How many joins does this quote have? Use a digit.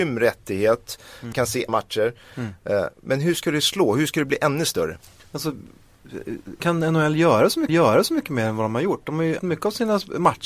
5